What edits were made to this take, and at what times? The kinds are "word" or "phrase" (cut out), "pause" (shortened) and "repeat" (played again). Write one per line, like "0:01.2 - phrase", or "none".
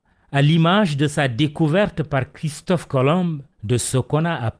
0:03.5 - pause